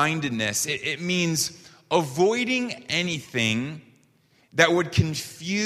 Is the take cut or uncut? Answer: uncut